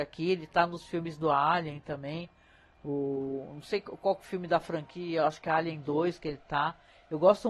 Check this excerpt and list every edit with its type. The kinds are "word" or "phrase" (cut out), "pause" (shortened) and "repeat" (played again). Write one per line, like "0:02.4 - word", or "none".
none